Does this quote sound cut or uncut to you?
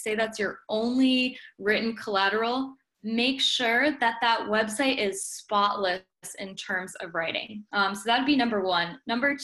cut